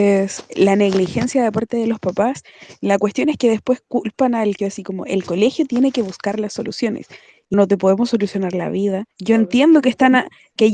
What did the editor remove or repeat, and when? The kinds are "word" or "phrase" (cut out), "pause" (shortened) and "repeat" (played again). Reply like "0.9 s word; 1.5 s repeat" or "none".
4.6 s word; 7.5 s word; 9.1 s pause